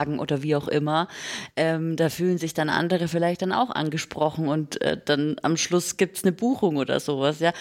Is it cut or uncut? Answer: uncut